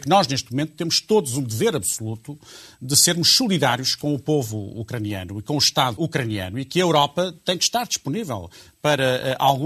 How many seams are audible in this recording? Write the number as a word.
one